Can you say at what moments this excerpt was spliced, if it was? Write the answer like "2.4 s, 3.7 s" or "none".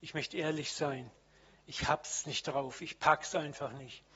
none